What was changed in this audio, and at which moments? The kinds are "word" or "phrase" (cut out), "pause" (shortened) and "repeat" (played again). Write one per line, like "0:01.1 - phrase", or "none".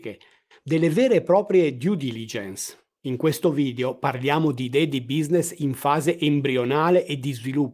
none